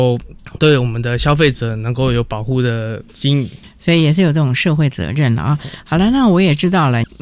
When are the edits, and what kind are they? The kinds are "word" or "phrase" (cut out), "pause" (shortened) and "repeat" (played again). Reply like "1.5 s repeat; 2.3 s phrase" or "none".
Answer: 3.1 s pause

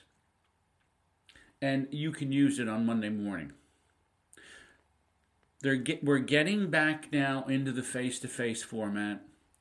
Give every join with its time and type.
none

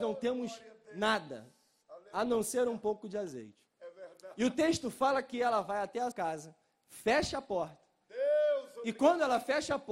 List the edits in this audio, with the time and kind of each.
6.1 s word

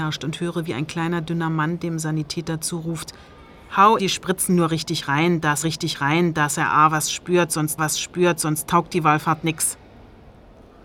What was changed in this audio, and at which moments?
4.0 s word; 5.6 s repeat; 7.8 s repeat

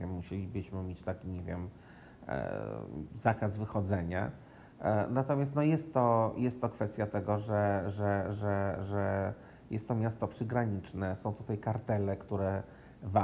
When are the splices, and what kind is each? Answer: none

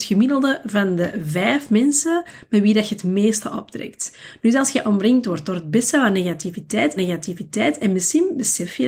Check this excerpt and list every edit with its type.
7.0 s repeat

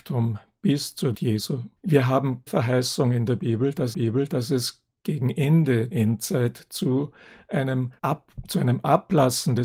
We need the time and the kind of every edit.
1.1 s word; 1.8 s pause; 2.5 s word; 3.9 s repeat; 5.9 s word; 8.0 s pause

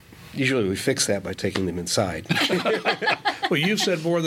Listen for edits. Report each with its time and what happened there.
none

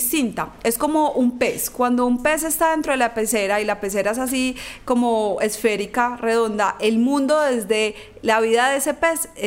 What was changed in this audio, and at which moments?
none

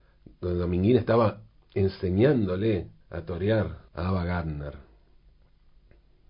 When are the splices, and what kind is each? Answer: 3.0 s pause; 3.9 s pause

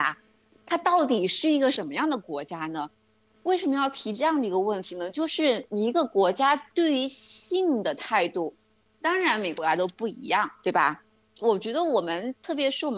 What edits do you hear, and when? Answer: none

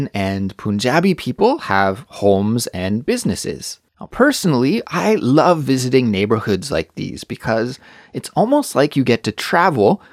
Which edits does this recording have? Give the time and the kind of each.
3.9 s pause

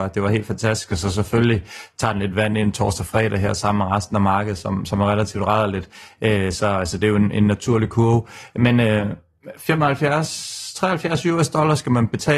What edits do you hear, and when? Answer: none

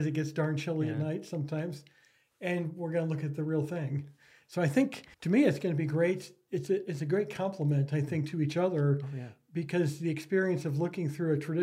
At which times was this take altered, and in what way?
5.1 s pause

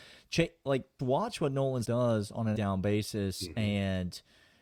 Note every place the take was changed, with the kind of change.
1.0 s word; 1.8 s word; 2.5 s word

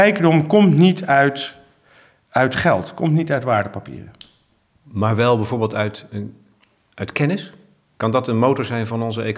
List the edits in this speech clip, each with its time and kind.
none

